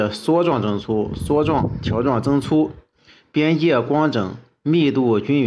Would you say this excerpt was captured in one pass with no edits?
yes; 0 cuts

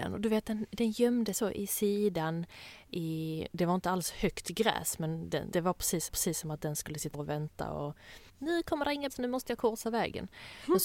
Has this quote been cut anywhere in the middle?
yes; 6 cuts; at 1.3 s, 5.5 s, 6.1 s, 7.1 s, 8.3 s, 9.1 s

